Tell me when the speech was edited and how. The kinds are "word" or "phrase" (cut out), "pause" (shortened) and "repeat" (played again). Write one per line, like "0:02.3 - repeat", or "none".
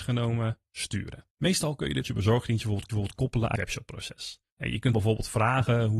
0:01.3 - pause
0:02.0 - word
0:02.9 - repeat
0:03.6 - word
0:04.5 - pause
0:04.9 - word